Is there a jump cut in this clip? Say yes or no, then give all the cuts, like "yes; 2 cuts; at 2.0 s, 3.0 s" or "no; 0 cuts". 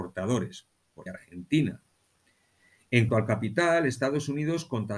yes; 2 cuts; at 1.1 s, 3.1 s